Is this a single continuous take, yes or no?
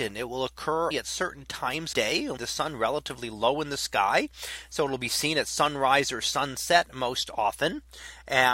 no